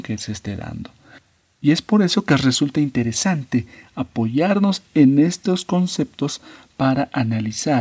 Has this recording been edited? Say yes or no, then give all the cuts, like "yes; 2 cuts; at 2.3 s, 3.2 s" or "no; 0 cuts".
no; 0 cuts